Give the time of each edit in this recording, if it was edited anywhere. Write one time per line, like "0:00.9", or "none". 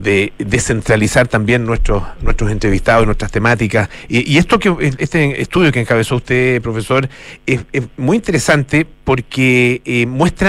none